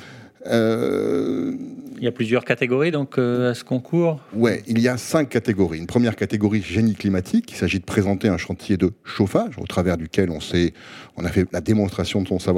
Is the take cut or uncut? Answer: uncut